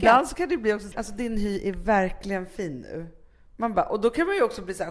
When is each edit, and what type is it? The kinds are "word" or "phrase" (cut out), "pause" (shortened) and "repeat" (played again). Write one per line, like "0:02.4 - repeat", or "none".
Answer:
0:00.9 - word

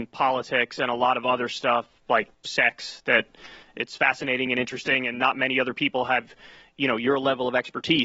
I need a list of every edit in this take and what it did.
none

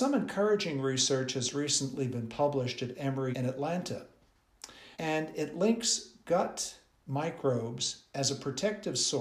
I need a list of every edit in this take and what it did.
0:03.3 - word
0:04.9 - pause

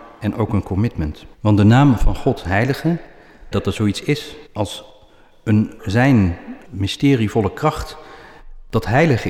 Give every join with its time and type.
0:01.3 - pause
0:03.5 - phrase
0:04.5 - pause
0:05.8 - word
0:06.6 - word

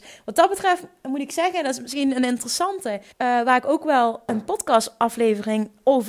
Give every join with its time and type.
0:03.1 - pause

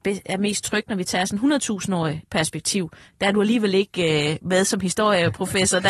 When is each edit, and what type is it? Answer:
none

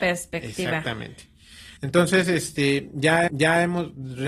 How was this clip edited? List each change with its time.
0:01.8 - pause
0:03.3 - repeat

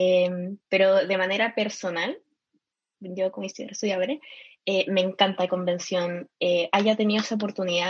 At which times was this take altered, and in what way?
0:05.5 - phrase

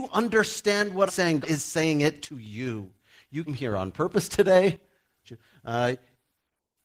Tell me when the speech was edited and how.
0:01.1 - word
0:01.4 - word
0:03.5 - word
0:05.2 - phrase

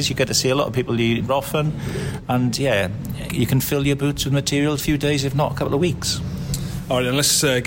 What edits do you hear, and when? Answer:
0:01.3 - phrase
0:03.3 - word
0:04.8 - phrase

